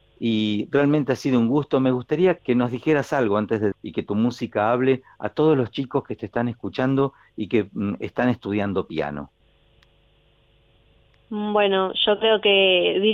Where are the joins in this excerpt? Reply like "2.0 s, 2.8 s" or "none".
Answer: 2.4 s, 3.7 s

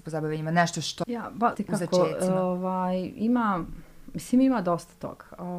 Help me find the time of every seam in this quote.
1.0 s, 1.5 s

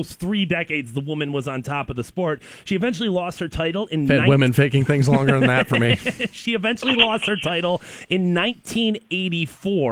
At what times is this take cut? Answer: none

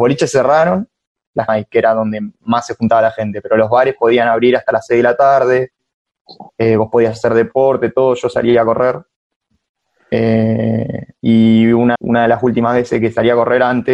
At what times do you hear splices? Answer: 1.5 s, 6.5 s, 11.1 s, 11.9 s

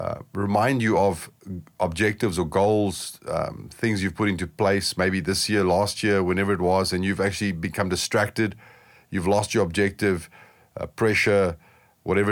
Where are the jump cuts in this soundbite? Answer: none

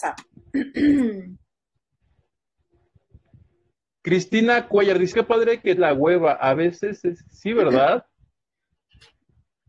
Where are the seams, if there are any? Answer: 5.1 s, 5.8 s

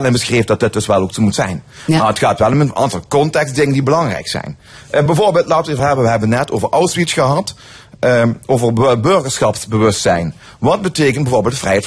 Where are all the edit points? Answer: none

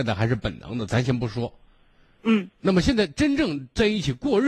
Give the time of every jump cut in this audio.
2.5 s

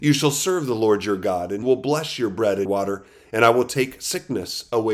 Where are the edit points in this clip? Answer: 1.6 s, 2.7 s

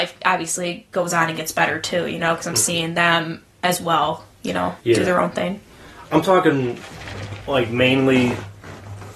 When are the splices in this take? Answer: 4.8 s

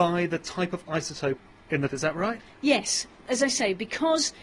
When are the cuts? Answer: 1.9 s

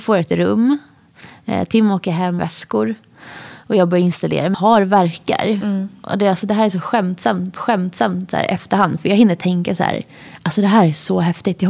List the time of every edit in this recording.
2.4 s, 4.5 s, 7.6 s

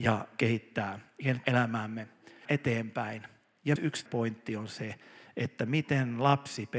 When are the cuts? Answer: 1.4 s, 2.4 s, 3.8 s, 4.1 s

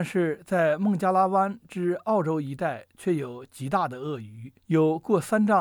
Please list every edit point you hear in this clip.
4.6 s

